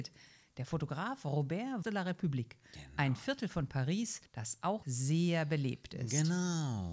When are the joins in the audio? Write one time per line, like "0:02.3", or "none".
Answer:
0:01.8
0:04.3
0:04.8